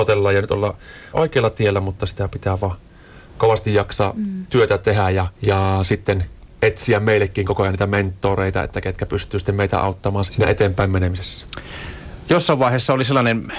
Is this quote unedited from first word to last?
no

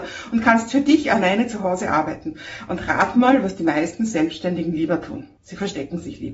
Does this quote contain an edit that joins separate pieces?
yes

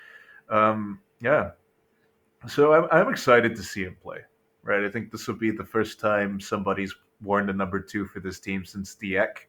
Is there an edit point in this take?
no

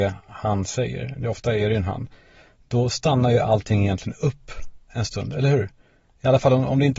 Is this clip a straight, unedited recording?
yes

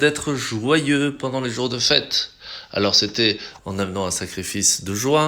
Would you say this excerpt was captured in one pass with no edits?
yes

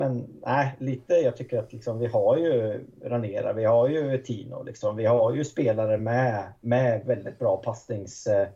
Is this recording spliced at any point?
no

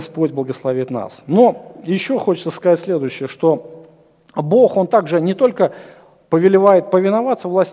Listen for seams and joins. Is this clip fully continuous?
yes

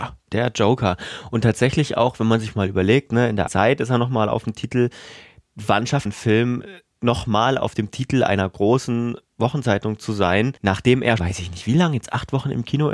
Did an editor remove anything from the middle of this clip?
yes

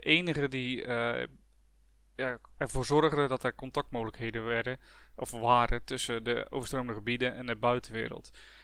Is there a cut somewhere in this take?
no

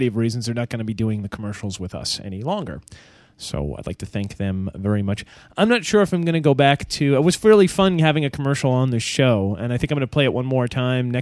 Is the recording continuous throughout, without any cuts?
yes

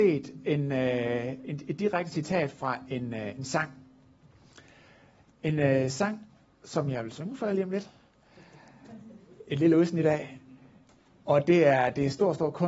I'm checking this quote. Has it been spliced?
no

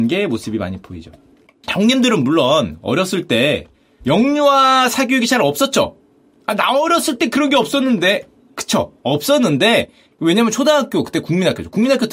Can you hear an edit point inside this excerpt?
no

